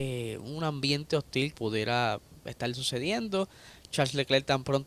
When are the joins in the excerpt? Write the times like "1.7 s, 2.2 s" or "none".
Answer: 1.5 s